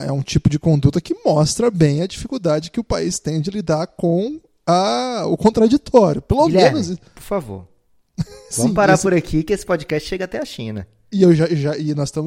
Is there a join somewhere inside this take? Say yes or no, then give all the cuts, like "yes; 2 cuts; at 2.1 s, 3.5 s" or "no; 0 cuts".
no; 0 cuts